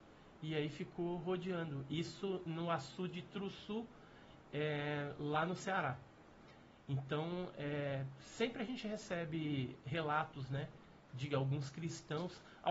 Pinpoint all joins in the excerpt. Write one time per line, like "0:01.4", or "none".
none